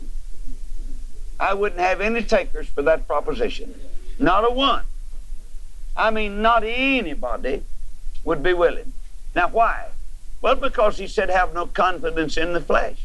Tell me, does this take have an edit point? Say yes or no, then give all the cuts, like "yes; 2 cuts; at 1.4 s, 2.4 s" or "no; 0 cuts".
no; 0 cuts